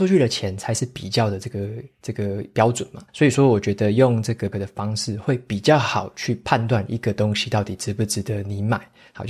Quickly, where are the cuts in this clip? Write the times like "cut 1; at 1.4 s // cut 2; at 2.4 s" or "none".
cut 1; at 3.1 s // cut 2; at 4.5 s